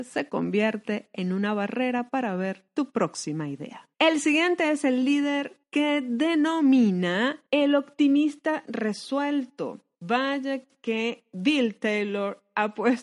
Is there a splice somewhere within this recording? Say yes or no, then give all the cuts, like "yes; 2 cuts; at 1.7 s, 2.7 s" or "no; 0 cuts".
yes; 5 cuts; at 2.7 s, 3.9 s, 5.6 s, 7.5 s, 9.9 s